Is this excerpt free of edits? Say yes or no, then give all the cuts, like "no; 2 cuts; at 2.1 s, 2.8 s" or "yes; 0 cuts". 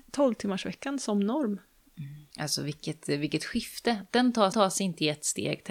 no; 2 cuts; at 2.3 s, 4.5 s